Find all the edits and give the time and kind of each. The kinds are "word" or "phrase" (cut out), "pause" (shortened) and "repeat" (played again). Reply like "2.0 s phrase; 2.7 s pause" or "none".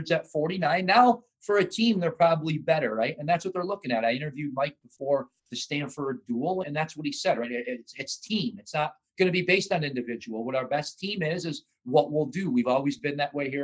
5.4 s pause; 6.6 s word

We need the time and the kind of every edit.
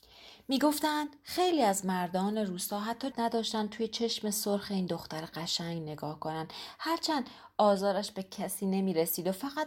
3.1 s word

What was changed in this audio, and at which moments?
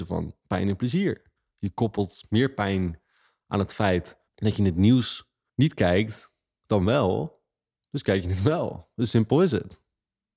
4.3 s pause

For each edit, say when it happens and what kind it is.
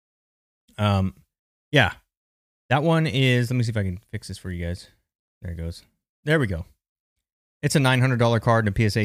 none

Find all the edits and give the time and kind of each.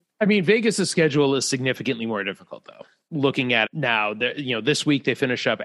3.1 s word; 3.6 s word

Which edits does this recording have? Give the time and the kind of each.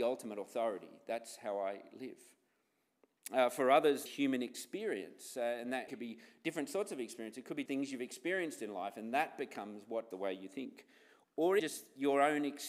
4.1 s word; 5.9 s word; 7.7 s word; 10.1 s word; 11.6 s word

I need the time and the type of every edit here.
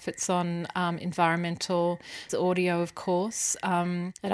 2.3 s word

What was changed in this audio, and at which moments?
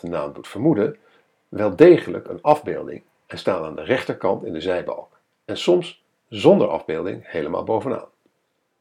none

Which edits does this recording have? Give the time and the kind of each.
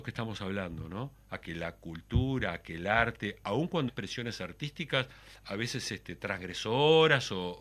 3.9 s word

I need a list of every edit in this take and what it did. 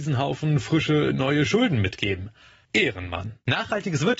none

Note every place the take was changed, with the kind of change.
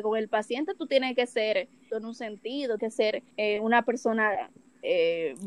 1.9 s word; 2.8 s word; 3.3 s pause

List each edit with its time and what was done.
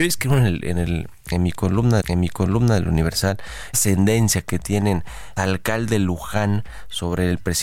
2.0 s repeat; 3.7 s word; 5.4 s word

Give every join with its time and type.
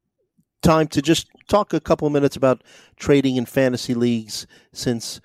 none

